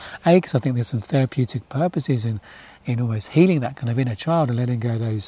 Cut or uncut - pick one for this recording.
uncut